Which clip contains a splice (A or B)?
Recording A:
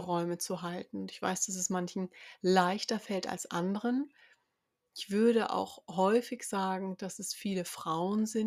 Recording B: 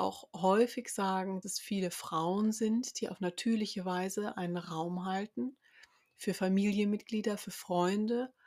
B